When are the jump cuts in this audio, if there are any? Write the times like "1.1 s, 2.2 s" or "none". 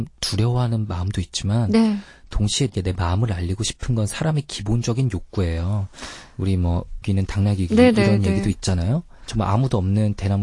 2.7 s, 7.0 s